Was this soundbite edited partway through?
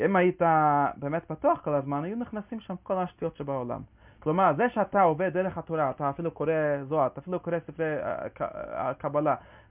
no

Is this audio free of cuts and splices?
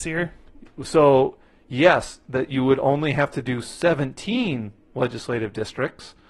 yes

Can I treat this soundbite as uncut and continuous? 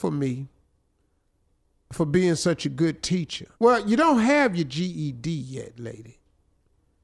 no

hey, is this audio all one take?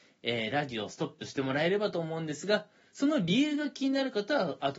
yes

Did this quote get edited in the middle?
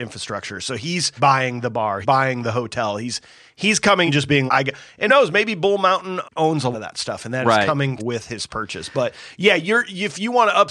yes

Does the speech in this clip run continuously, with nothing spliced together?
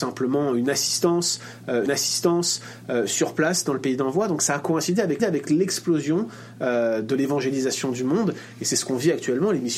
no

